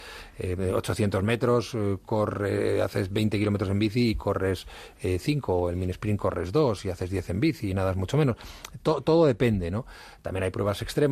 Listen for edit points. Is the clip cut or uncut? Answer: uncut